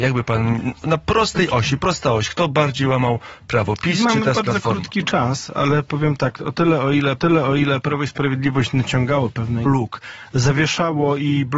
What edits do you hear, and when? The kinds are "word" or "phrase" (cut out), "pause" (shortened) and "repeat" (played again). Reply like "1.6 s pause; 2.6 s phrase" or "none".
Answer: 7.2 s repeat; 9.7 s phrase